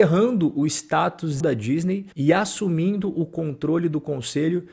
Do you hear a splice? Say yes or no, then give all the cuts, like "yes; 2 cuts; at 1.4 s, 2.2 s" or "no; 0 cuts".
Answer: yes; 2 cuts; at 1.4 s, 2.1 s